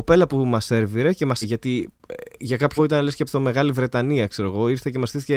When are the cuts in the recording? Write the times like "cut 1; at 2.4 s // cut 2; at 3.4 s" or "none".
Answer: cut 1; at 1.4 s // cut 2; at 2.8 s // cut 3; at 3.3 s